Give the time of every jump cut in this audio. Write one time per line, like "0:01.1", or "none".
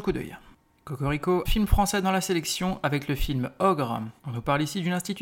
0:01.5
0:04.2